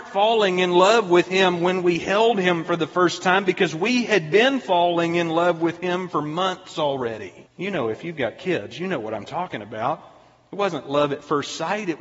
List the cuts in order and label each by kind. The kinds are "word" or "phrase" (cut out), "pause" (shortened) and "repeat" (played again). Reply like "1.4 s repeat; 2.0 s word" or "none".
7.5 s pause